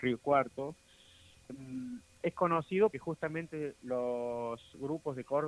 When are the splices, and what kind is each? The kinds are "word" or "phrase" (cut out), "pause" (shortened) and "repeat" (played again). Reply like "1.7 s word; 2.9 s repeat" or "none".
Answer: 1.5 s word; 2.9 s word